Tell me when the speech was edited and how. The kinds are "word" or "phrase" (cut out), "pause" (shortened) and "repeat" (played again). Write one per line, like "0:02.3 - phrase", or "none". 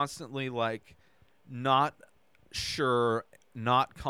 none